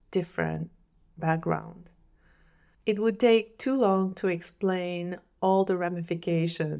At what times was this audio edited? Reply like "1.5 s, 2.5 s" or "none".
none